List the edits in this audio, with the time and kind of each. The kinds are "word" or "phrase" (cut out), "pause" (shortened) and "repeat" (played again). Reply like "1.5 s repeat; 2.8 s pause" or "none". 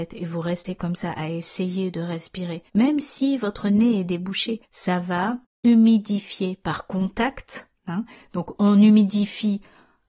2.7 s pause; 4.6 s pause; 7.8 s pause